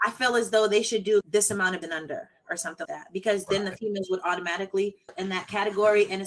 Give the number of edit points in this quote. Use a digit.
4